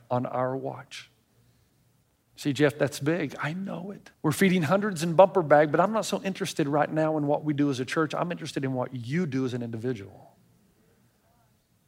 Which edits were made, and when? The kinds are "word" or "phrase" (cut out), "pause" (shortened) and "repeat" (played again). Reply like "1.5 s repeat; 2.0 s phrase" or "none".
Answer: 4.1 s pause